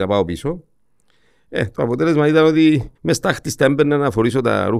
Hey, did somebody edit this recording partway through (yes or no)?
yes